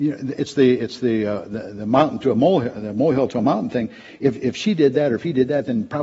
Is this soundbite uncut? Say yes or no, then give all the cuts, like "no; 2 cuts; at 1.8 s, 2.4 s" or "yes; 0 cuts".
yes; 0 cuts